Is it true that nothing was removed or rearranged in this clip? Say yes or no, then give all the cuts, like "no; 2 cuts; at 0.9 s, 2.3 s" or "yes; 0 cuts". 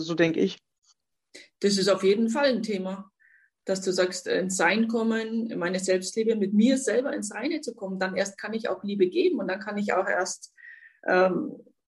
yes; 0 cuts